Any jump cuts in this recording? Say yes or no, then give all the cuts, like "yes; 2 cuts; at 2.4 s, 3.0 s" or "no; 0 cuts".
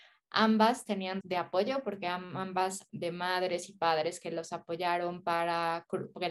yes; 2 cuts; at 1.2 s, 2.9 s